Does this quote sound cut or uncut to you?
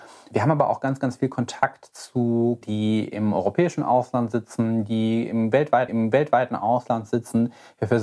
cut